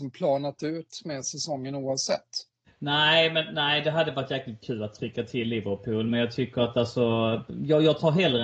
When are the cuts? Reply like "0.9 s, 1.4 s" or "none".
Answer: 2.7 s